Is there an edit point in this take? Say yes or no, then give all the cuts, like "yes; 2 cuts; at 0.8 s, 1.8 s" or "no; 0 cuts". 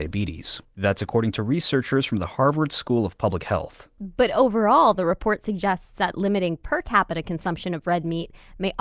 no; 0 cuts